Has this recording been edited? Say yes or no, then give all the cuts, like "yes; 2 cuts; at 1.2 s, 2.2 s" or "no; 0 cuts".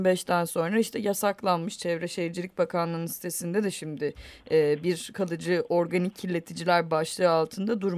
no; 0 cuts